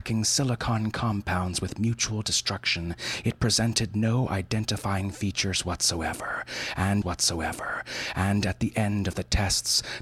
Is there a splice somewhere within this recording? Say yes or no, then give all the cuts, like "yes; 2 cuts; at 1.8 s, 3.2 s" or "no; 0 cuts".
yes; 1 cut; at 7.0 s